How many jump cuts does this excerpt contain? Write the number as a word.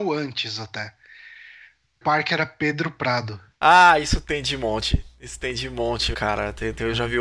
two